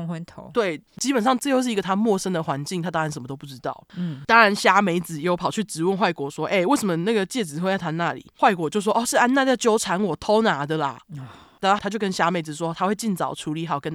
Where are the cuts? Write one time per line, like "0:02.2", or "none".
0:11.0